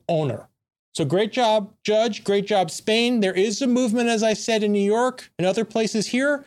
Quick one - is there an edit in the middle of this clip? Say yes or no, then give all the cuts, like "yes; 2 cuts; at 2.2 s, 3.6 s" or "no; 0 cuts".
no; 0 cuts